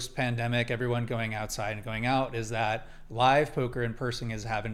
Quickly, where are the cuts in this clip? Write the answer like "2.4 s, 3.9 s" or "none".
none